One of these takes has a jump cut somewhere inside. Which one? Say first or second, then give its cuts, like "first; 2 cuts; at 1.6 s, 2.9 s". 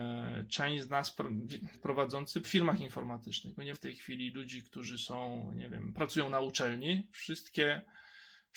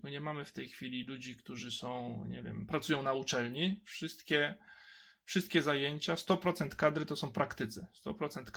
first; 3 cuts; at 1.7 s, 2.4 s, 3.7 s